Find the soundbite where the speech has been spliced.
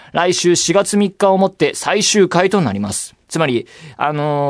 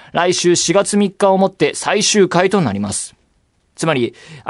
first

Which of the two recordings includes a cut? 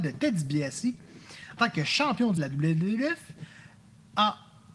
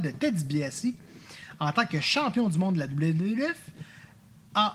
first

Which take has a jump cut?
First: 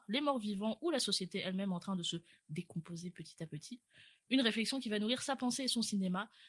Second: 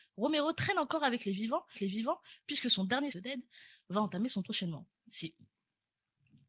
second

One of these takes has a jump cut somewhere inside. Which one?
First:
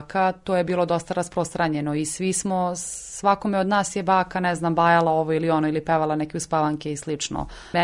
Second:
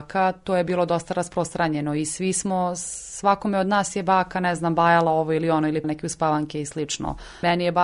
second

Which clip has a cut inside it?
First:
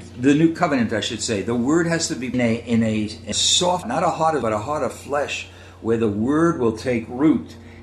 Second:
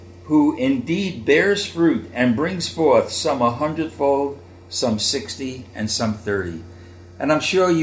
first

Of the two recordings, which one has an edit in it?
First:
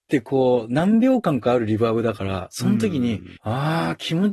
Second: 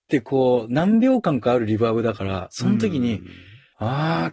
first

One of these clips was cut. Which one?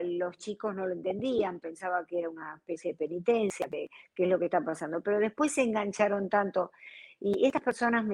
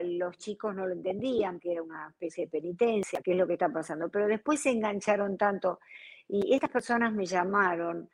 second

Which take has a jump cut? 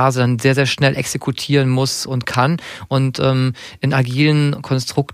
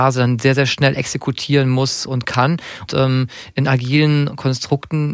second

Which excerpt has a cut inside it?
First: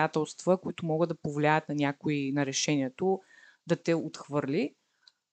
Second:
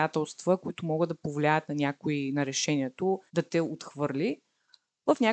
second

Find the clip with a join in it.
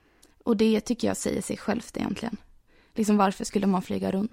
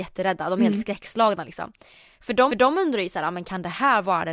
second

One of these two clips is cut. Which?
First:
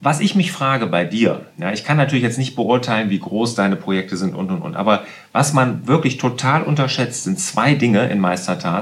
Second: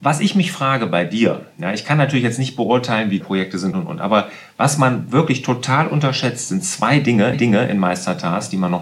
second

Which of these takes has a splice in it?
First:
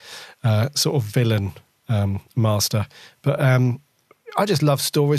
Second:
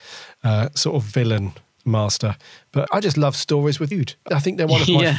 second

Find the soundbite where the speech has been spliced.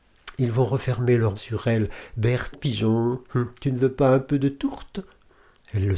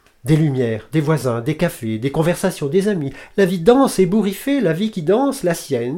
first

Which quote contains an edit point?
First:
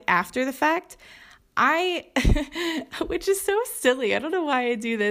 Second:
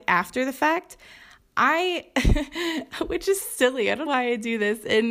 second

